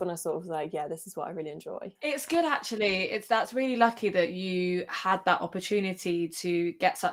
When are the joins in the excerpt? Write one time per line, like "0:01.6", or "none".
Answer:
none